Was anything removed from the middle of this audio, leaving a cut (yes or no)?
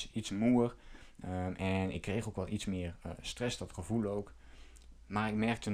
no